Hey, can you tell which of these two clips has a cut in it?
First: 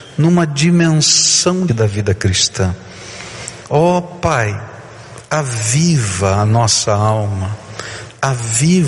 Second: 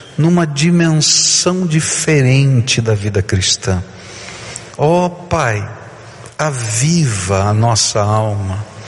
first; 1 cut; at 1.7 s

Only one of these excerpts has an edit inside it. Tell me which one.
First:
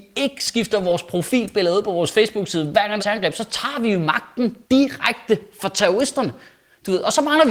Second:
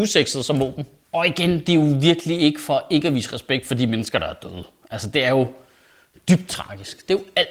first; 2 cuts; at 3.0 s, 4.6 s

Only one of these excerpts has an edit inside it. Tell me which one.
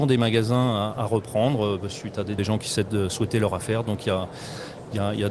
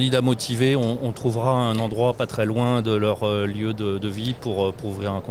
first; 1 cut; at 2.4 s

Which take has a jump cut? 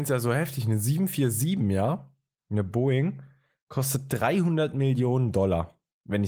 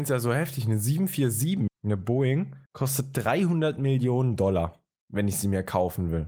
second; 2 cuts; at 1.7 s, 2.7 s

